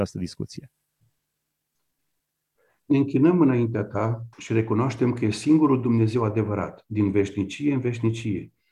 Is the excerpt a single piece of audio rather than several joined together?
no; 1 cut; at 4.3 s

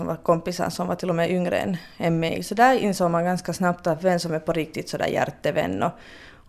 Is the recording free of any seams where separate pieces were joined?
yes; 0 cuts

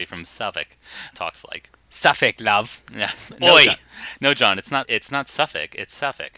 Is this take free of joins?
no; 2 cuts; at 1.1 s, 4.8 s

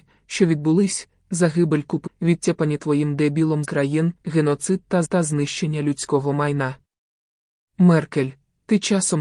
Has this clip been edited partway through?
yes; 4 cuts; at 2.1 s, 3.6 s, 4.2 s, 5.0 s

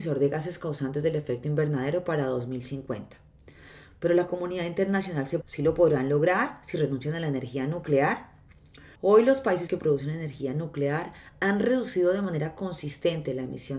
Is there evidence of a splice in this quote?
yes; 3 cuts; at 5.4 s, 9.0 s, 9.7 s

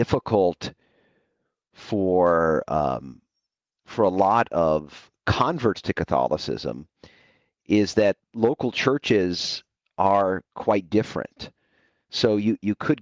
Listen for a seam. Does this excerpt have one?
no; 0 cuts

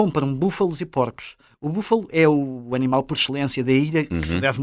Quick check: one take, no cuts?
yes; 0 cuts

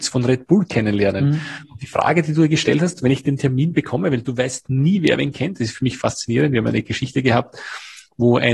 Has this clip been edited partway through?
no; 0 cuts

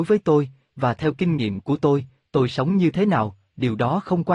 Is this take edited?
no; 0 cuts

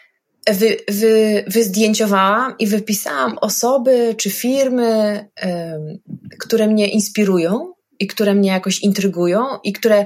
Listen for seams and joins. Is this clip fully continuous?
yes; 0 cuts

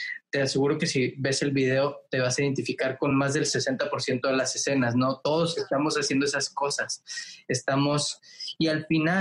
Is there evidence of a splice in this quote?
no; 0 cuts

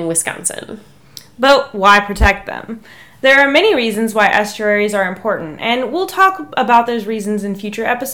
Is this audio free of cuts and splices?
yes; 0 cuts

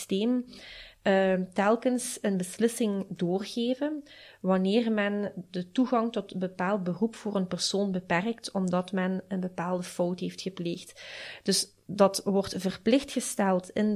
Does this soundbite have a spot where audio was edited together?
no; 0 cuts

